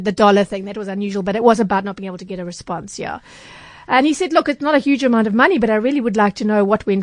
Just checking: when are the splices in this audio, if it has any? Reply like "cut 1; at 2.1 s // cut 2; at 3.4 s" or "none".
none

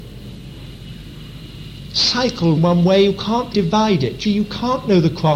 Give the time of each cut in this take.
cut 1; at 2.6 s // cut 2; at 3.5 s // cut 3; at 4.2 s

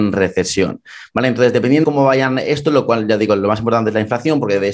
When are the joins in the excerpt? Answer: cut 1; at 1.8 s

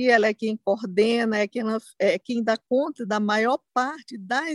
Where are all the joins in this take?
none

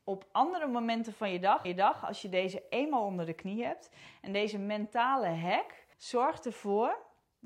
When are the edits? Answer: cut 1; at 1.6 s // cut 2; at 5.9 s

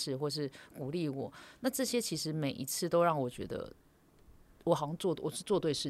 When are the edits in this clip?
none

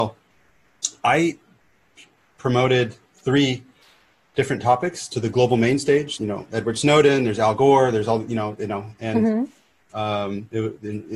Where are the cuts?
cut 1; at 6.2 s

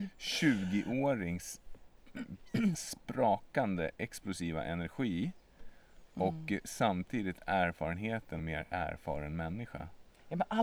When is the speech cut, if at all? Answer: cut 1; at 2.7 s // cut 2; at 8.4 s

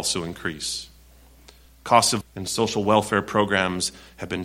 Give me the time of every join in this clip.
cut 1; at 2.2 s

